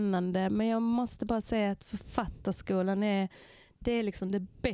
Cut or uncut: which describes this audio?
uncut